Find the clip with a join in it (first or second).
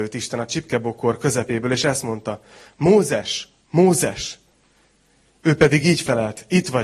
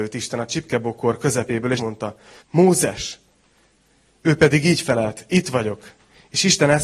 second